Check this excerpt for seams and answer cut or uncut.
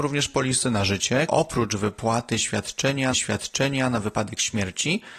cut